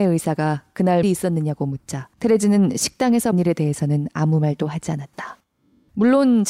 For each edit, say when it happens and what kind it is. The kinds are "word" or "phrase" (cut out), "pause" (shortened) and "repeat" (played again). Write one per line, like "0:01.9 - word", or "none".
0:01.0 - phrase
0:02.1 - pause
0:03.3 - word